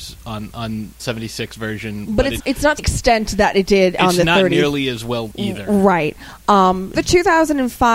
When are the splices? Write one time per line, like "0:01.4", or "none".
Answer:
0:01.0
0:02.4
0:02.8
0:05.3
0:06.9